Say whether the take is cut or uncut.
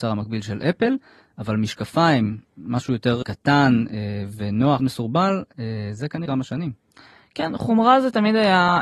cut